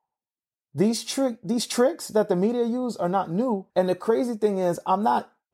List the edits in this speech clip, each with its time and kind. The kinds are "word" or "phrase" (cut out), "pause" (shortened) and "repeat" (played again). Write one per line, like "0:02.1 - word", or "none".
0:03.7 - pause